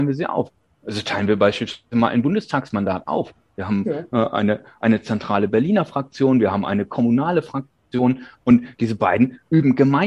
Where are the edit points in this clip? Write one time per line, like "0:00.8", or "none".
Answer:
none